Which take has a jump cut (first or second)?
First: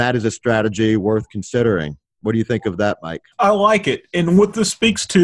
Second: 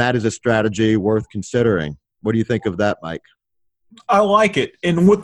first